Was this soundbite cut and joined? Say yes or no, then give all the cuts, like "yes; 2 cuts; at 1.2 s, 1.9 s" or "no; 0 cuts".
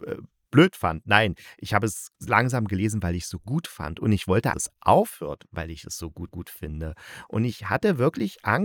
yes; 3 cuts; at 2.1 s, 4.5 s, 6.3 s